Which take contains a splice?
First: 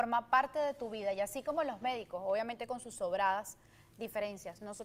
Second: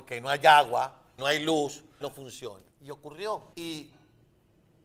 second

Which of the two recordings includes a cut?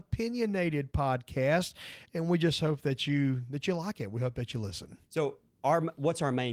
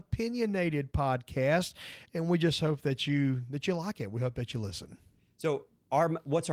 first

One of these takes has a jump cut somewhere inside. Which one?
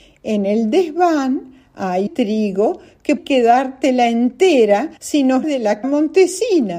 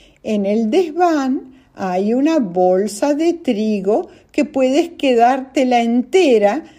first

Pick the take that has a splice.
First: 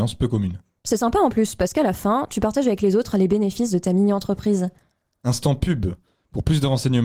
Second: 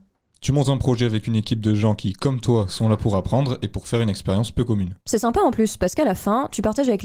second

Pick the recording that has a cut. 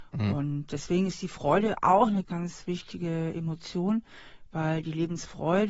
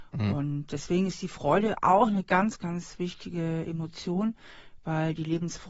first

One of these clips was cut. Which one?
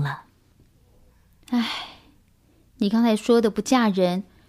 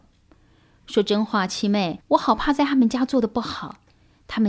second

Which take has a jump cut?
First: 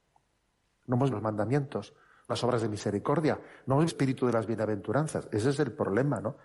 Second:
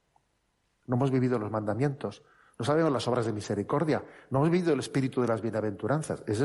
first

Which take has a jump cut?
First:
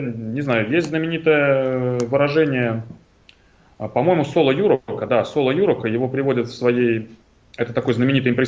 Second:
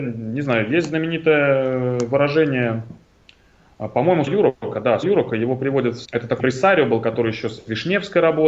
second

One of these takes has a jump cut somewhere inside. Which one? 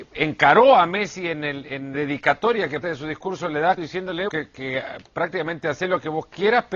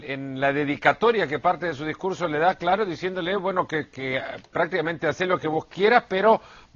first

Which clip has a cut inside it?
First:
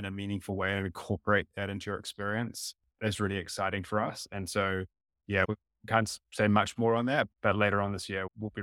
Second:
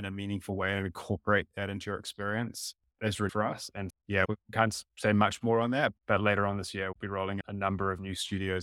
second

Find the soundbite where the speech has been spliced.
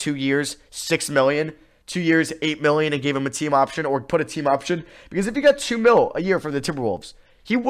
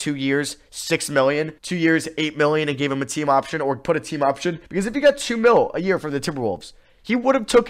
second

